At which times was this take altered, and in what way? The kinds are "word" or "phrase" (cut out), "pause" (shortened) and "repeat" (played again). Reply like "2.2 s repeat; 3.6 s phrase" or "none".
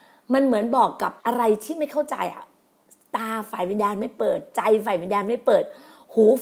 1.2 s pause